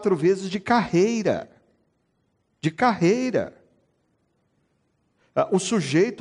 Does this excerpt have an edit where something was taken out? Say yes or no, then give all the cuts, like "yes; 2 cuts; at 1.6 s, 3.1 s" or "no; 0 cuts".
no; 0 cuts